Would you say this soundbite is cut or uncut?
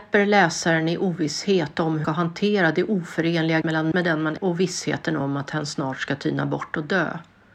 cut